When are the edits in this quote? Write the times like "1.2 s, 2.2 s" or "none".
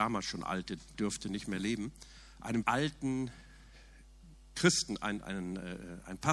0.9 s, 2.6 s, 5.2 s